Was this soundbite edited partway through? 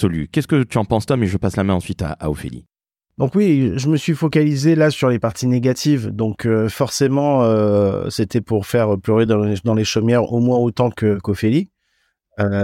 no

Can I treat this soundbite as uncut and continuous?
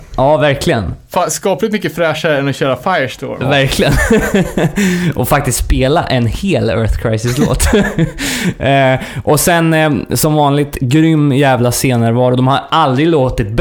yes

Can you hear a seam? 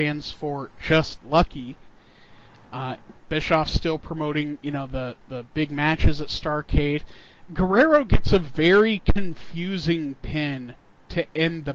no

